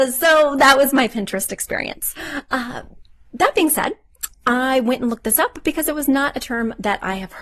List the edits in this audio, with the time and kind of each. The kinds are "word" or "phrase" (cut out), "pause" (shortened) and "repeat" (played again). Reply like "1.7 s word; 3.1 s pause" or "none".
none